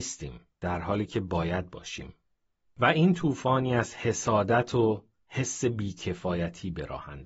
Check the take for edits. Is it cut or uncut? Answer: uncut